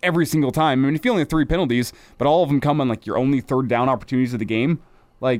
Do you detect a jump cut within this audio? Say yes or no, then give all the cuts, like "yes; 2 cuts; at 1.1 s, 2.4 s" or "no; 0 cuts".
no; 0 cuts